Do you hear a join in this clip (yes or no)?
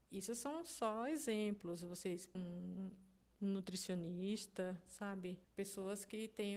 yes